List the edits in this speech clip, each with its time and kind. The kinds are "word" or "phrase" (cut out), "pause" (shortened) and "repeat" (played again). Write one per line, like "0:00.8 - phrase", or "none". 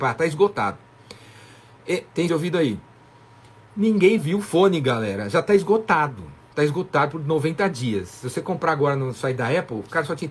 0:02.3 - phrase
0:04.2 - word